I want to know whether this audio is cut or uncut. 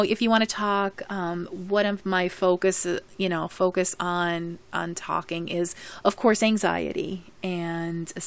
uncut